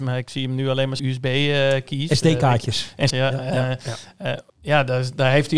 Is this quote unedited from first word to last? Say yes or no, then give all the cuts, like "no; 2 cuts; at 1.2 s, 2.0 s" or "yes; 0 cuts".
no; 3 cuts; at 1.0 s, 3.1 s, 4.5 s